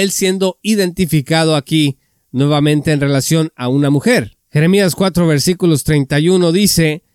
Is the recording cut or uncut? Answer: uncut